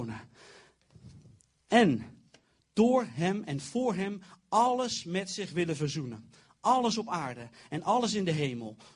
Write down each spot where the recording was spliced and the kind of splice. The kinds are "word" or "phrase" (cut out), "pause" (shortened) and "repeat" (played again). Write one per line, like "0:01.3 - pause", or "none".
none